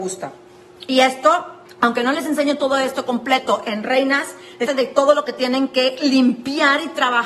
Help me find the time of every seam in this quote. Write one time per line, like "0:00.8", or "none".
0:01.7
0:04.7